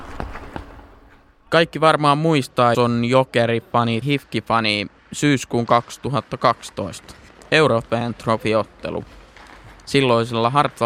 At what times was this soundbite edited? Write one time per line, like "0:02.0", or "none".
0:02.7
0:04.0
0:05.0
0:07.3